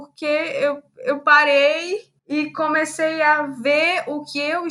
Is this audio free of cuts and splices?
no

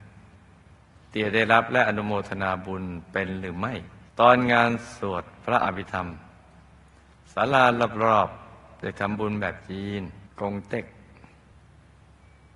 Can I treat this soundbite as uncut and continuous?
no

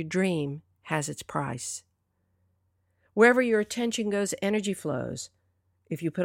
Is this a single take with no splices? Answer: yes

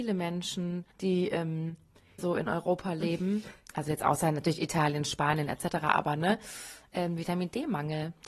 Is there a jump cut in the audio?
yes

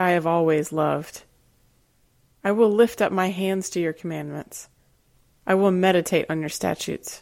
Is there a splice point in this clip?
no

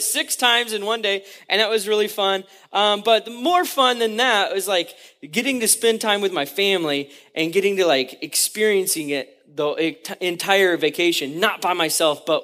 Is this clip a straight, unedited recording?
yes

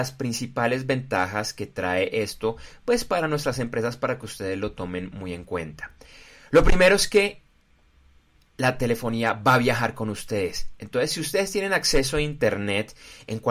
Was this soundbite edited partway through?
no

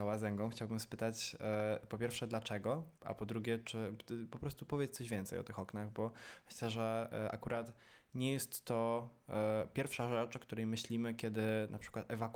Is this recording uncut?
no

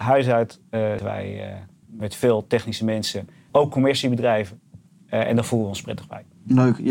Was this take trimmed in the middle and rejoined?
yes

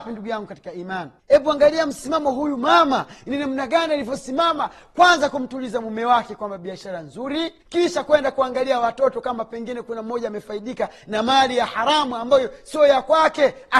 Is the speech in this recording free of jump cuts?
no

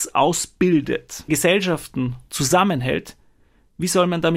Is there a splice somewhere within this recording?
yes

